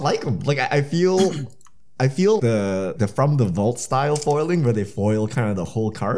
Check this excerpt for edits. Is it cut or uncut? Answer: cut